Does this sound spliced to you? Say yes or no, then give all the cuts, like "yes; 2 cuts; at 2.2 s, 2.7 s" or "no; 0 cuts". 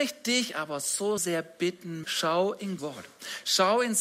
yes; 3 cuts; at 1.2 s, 2.0 s, 2.8 s